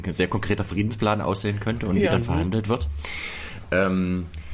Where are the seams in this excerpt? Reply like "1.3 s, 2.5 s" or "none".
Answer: none